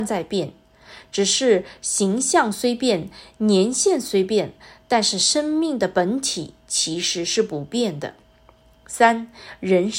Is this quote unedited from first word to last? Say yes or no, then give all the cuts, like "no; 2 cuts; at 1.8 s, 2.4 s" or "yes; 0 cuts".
yes; 0 cuts